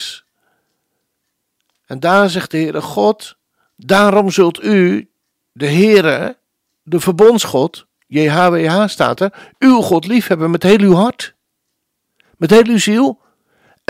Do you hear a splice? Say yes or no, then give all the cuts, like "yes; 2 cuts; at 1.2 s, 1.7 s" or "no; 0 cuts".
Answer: no; 0 cuts